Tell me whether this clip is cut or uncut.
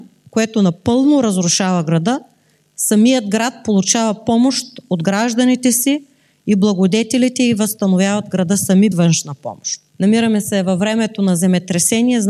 cut